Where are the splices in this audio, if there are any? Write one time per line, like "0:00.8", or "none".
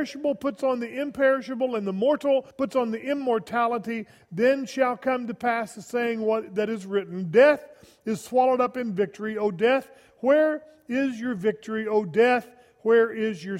0:02.5